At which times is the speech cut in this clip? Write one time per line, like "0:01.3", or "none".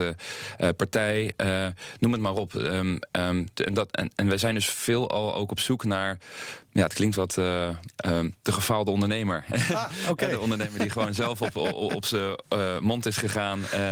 none